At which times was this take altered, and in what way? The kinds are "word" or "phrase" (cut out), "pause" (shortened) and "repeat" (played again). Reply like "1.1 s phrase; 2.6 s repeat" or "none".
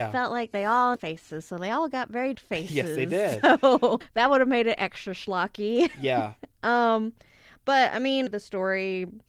1.0 s word; 2.3 s word; 4.0 s word; 8.3 s word